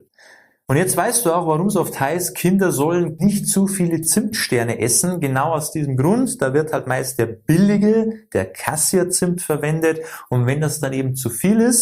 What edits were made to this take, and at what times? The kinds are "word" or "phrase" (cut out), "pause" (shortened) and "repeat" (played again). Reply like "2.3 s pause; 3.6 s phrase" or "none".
none